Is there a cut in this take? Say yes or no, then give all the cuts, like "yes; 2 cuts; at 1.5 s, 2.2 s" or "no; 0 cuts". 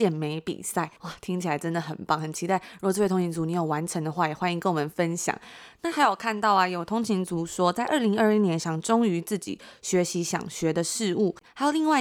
yes; 1 cut; at 1.0 s